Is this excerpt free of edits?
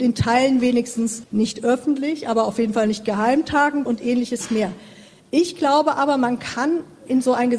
no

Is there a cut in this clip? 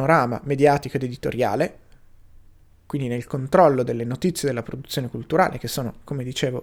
no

